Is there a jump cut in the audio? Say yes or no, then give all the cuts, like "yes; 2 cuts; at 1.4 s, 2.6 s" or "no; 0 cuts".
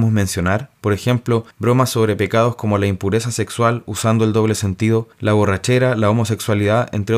no; 0 cuts